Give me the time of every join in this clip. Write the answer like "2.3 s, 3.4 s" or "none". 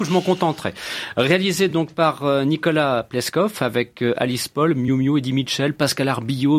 none